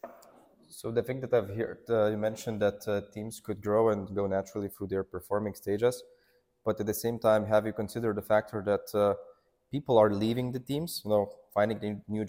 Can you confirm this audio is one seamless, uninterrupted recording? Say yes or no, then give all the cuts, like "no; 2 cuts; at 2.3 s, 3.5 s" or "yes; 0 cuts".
yes; 0 cuts